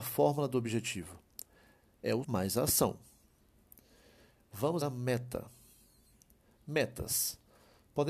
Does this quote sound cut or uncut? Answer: cut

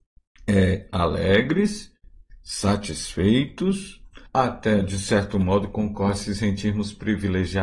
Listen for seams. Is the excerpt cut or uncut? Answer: cut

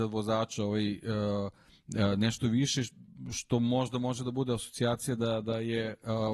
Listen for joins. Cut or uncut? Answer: uncut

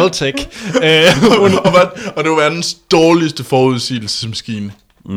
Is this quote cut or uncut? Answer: uncut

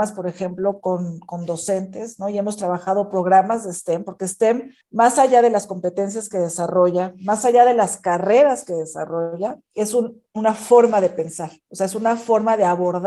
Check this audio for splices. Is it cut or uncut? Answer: cut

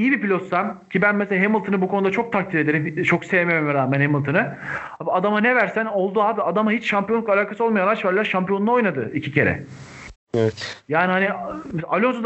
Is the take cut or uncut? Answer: cut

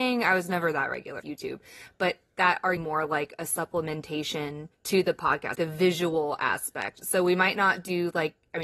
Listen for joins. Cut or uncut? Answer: cut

